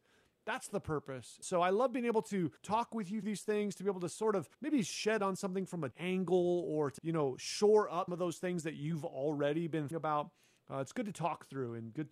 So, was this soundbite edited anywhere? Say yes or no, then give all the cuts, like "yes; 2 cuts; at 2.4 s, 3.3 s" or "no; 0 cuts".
yes; 9 cuts; at 1.4 s, 2.6 s, 3.2 s, 4.5 s, 5.2 s, 5.9 s, 7.0 s, 8.1 s, 9.9 s